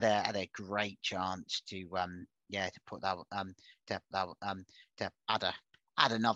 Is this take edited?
yes; 1 cut; at 4.1 s

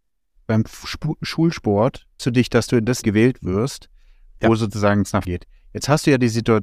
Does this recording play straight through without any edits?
no; 3 cuts; at 2.2 s, 3.0 s, 5.2 s

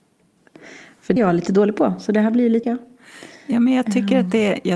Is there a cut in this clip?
yes; 2 cuts; at 1.2 s, 2.6 s

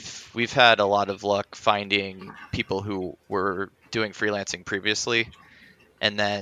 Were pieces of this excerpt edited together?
yes; 1 cut; at 3.7 s

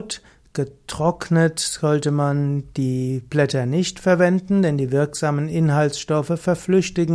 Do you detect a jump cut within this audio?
no; 0 cuts

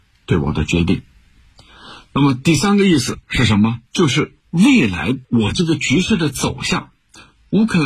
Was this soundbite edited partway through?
yes; 4 cuts; at 3.2 s, 3.9 s, 4.4 s, 5.2 s

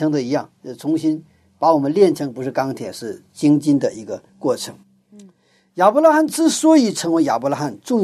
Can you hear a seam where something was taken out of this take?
yes; 1 cut; at 4.3 s

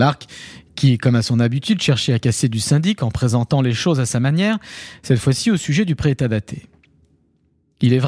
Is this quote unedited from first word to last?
yes; 0 cuts

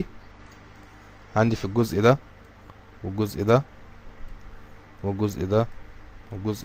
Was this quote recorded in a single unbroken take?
yes; 0 cuts

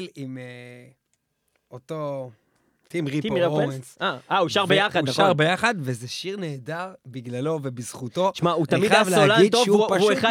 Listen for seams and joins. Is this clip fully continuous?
yes; 0 cuts

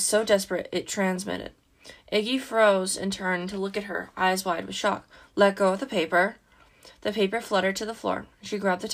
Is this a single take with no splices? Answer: yes; 0 cuts

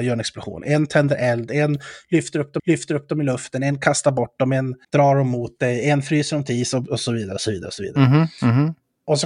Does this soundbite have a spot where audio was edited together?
yes; 2 cuts; at 2.6 s, 4.8 s

